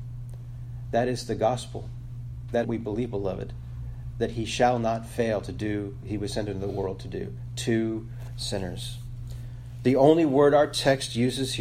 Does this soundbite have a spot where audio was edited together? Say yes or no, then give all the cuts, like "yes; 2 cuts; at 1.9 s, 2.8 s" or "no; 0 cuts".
yes; 3 cuts; at 2.6 s, 6.0 s, 8.3 s